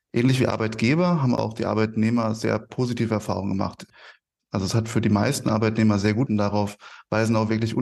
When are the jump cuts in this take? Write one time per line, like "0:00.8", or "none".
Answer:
0:06.3